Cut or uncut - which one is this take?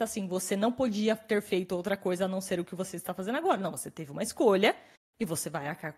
uncut